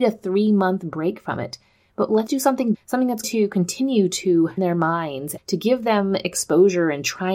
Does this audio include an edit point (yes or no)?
yes